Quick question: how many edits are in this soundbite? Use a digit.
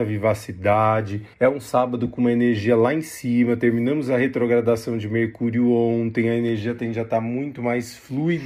1